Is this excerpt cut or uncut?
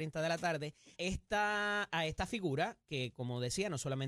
cut